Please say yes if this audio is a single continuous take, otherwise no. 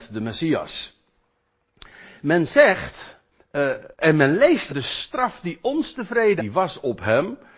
no